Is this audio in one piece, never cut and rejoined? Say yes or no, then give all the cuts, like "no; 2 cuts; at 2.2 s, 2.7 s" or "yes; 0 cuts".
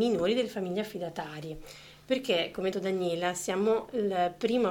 no; 1 cut; at 2.7 s